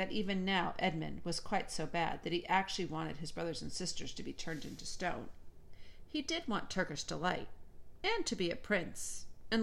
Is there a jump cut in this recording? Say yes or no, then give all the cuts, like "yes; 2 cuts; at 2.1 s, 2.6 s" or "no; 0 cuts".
no; 0 cuts